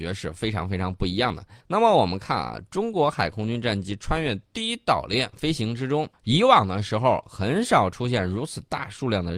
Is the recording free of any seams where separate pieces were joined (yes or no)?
no